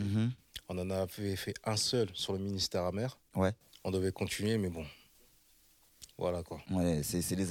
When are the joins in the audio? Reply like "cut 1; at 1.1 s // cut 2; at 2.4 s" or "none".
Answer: none